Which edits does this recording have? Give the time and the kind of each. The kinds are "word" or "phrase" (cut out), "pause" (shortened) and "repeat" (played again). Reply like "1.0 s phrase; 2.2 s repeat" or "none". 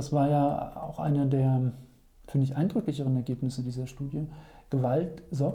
none